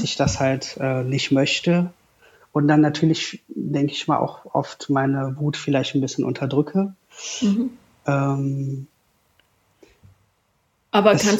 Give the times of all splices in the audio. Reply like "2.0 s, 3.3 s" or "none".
none